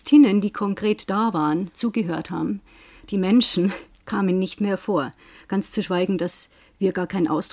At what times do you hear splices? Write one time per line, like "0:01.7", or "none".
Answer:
none